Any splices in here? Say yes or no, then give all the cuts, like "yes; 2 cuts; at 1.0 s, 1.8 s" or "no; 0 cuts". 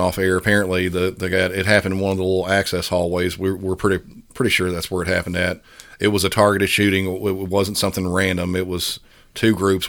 no; 0 cuts